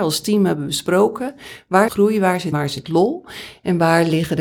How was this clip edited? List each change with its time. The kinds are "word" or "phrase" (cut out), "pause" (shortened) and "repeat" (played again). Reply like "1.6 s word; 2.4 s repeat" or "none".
1.9 s word; 2.5 s word